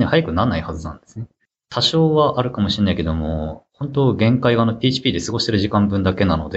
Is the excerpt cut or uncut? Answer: uncut